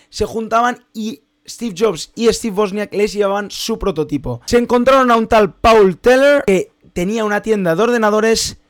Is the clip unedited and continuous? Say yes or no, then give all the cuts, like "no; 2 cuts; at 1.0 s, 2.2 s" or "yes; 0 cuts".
yes; 0 cuts